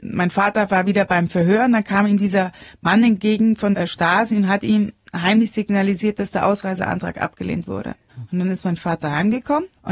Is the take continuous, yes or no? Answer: yes